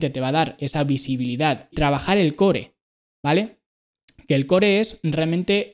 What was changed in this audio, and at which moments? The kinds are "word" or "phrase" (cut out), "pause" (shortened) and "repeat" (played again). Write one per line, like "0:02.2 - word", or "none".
0:01.7 - phrase